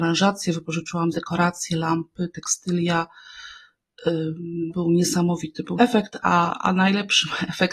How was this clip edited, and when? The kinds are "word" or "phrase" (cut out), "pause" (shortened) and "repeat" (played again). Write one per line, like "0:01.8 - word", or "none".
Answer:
0:01.1 - phrase
0:04.7 - word
0:05.8 - word

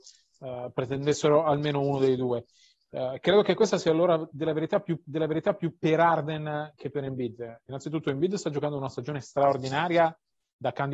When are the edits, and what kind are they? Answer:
0:05.0 - repeat

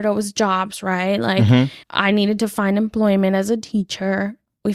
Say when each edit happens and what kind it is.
0:01.8 - pause

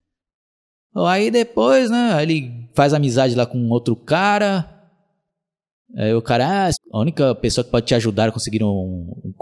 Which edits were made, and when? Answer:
0:06.7 - phrase

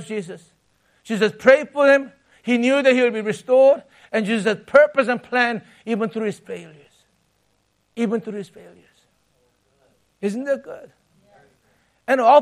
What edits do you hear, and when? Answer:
none

